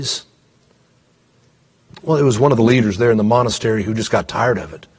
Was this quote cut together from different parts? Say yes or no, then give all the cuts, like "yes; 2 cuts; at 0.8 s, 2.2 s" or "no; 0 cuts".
no; 0 cuts